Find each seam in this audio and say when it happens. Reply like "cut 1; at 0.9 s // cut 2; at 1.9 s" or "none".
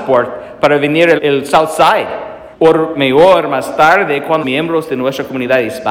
cut 1; at 1.2 s // cut 2; at 2.5 s // cut 3; at 4.4 s